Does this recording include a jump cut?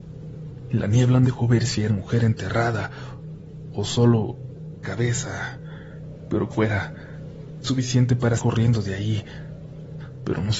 yes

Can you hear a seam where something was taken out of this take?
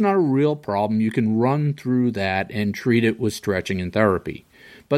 no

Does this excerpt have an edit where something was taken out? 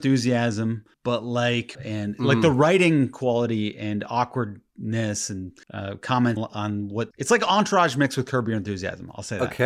yes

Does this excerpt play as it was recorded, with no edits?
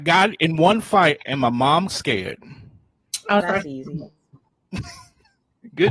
no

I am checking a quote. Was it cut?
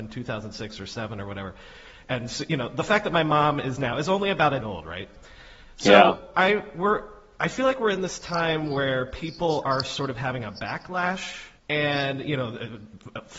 yes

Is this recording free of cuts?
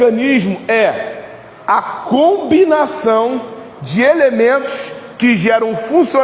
yes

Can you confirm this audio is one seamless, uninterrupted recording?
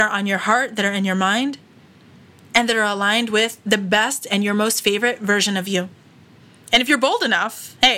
yes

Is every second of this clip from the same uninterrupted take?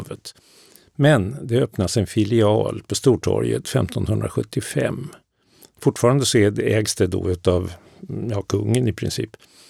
yes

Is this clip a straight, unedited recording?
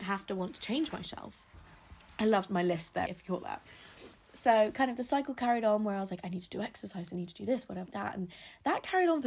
no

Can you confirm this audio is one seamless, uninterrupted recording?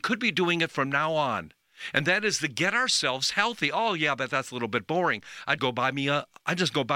no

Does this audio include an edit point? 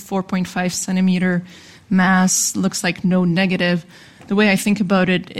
no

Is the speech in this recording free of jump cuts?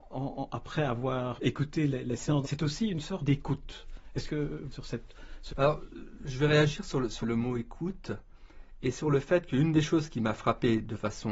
no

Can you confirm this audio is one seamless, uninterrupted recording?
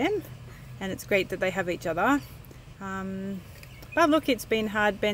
no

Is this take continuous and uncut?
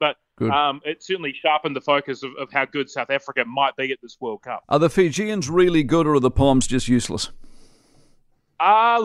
yes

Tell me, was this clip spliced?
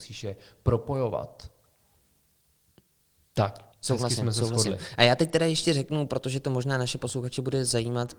yes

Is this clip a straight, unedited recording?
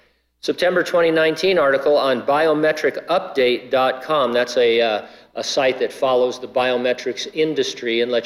yes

